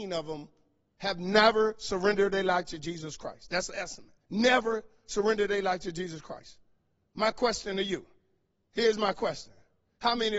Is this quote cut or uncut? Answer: cut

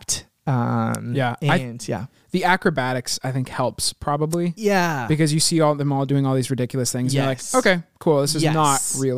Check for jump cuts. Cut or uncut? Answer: uncut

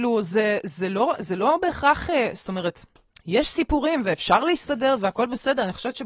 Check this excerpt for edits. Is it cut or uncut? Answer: cut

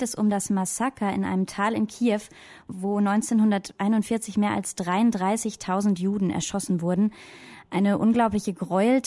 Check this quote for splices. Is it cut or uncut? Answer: uncut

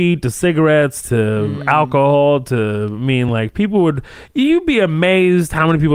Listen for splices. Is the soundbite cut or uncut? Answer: uncut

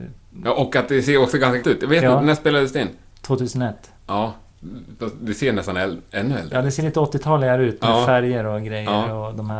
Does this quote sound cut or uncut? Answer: cut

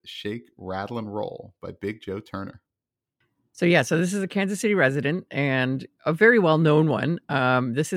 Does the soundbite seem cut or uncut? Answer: uncut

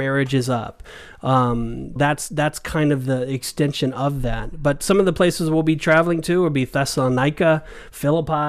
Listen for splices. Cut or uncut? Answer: cut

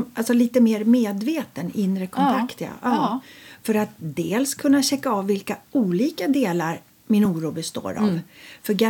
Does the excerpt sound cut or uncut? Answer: uncut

